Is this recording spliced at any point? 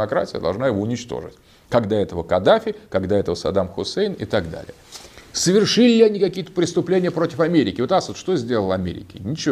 no; 0 cuts

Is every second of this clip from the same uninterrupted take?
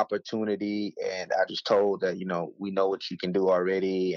no; 1 cut; at 1.5 s

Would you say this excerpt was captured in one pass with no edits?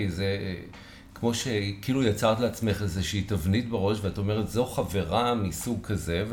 yes; 0 cuts

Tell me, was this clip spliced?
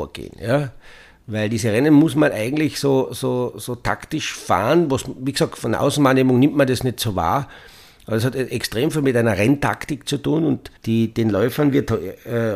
yes; 1 cut; at 10.8 s

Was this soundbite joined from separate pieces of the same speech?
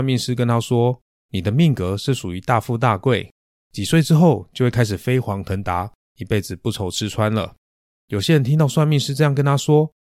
no; 0 cuts

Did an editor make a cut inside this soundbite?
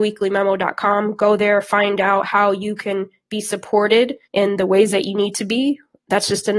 yes; 1 cut; at 4.2 s

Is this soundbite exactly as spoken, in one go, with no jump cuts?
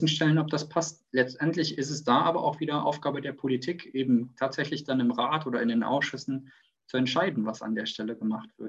yes; 0 cuts

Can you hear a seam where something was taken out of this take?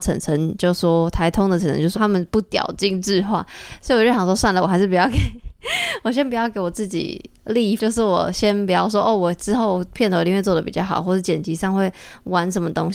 yes; 3 cuts; at 1.9 s, 5.6 s, 7.8 s

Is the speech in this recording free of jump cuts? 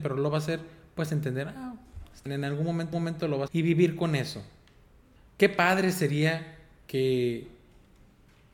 no; 4 cuts; at 2.3 s, 2.9 s, 3.5 s, 5.2 s

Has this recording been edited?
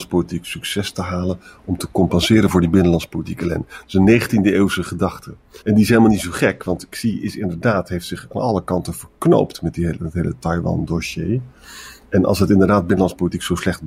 yes; 1 cut; at 5.6 s

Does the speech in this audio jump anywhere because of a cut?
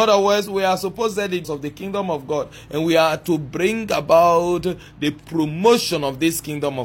yes; 1 cut; at 1.4 s

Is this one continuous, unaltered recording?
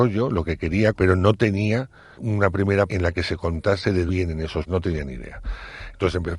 no; 5 cuts; at 0.9 s, 2.2 s, 2.9 s, 4.1 s, 4.7 s

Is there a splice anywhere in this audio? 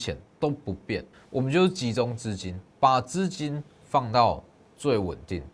yes; 2 cuts; at 1.1 s, 2.7 s

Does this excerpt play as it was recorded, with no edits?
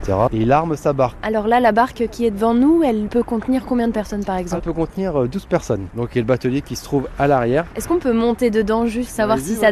no; 1 cut; at 4.6 s

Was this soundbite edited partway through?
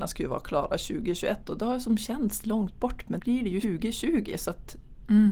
yes; 2 cuts; at 3.2 s, 3.6 s

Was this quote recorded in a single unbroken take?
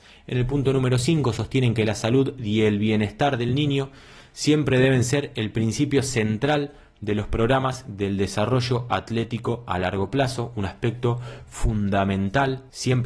yes; 0 cuts

